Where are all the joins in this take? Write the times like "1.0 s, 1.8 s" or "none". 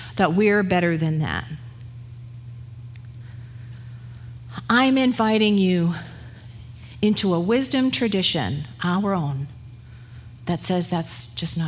none